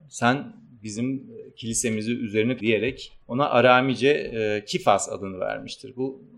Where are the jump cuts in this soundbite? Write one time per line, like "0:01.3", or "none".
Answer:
0:02.6
0:03.2